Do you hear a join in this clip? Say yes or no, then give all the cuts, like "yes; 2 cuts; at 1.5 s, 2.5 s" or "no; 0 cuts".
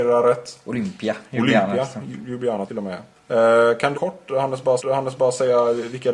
yes; 4 cuts; at 2.7 s, 3.2 s, 3.9 s, 4.8 s